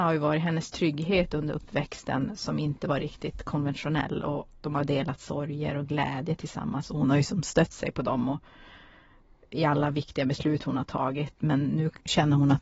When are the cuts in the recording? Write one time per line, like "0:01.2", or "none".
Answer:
none